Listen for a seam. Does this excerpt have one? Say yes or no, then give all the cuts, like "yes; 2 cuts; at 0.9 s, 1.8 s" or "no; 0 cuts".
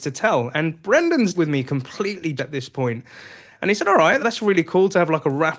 yes; 3 cuts; at 1.3 s, 2.4 s, 4.2 s